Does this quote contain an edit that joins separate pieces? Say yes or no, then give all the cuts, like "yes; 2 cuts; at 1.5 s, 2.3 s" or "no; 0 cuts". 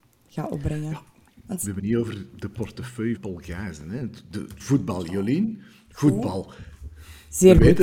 yes; 3 cuts; at 1.8 s, 3.2 s, 4.6 s